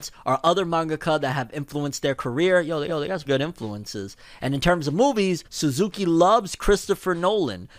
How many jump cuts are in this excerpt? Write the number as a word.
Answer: three